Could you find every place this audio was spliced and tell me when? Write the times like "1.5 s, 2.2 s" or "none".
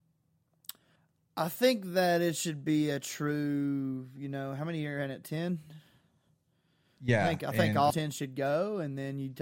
1.0 s, 7.9 s